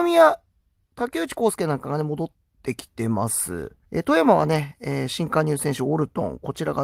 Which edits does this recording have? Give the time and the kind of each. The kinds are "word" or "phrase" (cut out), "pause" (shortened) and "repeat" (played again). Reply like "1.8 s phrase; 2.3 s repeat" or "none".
3.8 s pause